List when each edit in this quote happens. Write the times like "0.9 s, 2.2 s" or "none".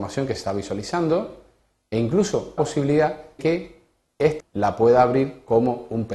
2.6 s, 3.4 s, 4.4 s